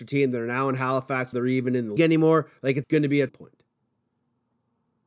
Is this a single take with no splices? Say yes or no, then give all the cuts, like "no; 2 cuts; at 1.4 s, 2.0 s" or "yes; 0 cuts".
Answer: no; 4 cuts; at 1.3 s, 2.0 s, 2.8 s, 3.3 s